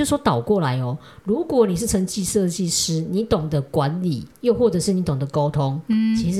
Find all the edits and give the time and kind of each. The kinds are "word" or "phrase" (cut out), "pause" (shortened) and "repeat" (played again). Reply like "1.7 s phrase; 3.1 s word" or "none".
4.3 s pause